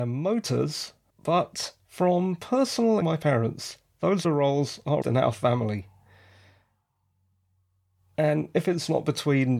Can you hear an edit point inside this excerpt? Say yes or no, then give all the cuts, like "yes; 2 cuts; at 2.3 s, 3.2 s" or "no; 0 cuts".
yes; 4 cuts; at 1.1 s, 3.0 s, 4.2 s, 5.0 s